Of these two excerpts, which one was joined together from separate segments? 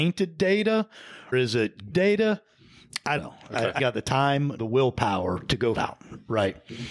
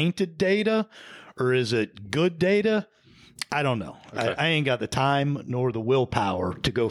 first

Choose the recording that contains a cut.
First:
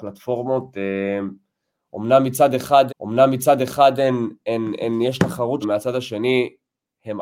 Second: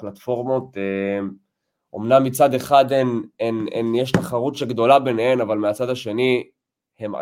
first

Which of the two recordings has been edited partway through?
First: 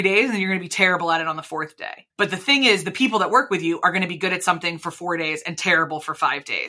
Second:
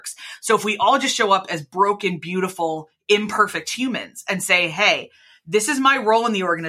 first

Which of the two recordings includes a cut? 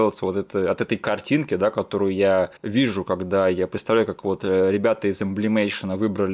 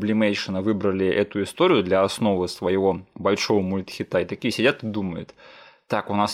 first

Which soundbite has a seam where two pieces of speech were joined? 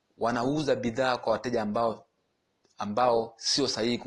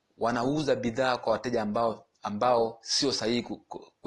second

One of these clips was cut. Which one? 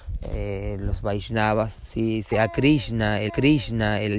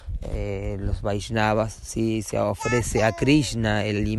first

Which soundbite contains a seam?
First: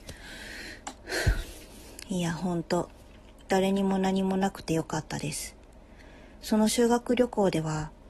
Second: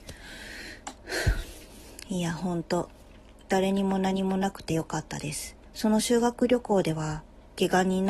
second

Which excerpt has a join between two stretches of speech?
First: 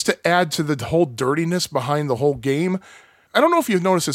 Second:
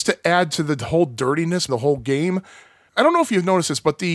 second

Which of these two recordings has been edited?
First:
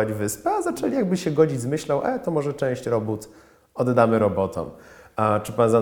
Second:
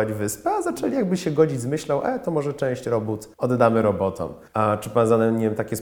second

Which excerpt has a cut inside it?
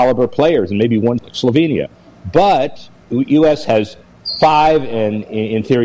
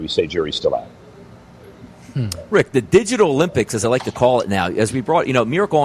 first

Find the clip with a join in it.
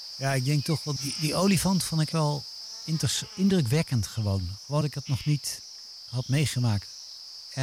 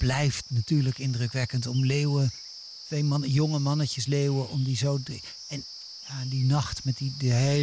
first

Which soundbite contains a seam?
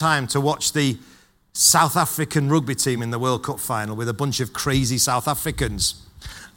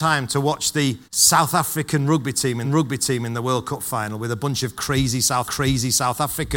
second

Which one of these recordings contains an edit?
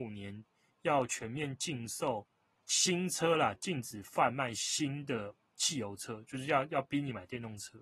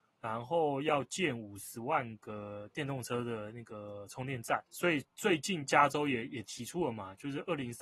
second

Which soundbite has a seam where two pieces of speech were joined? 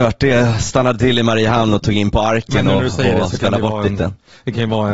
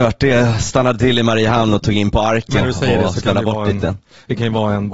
second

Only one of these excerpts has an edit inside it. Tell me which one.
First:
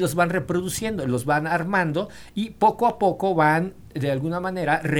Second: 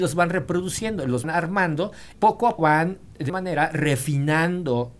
second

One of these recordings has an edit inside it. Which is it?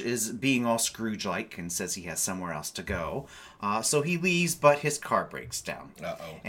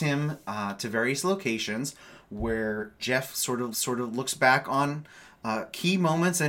second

